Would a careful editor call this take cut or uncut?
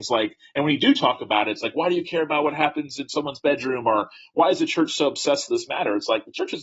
uncut